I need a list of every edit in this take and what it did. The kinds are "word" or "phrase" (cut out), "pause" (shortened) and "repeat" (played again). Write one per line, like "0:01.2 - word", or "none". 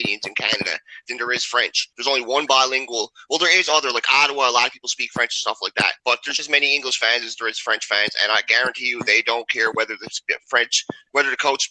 0:01.9 - pause
0:06.0 - pause
0:06.4 - word